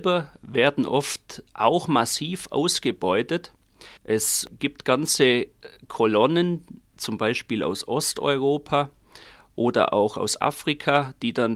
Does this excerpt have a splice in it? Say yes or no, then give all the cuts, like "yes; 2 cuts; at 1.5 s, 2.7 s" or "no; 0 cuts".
yes; 1 cut; at 4.0 s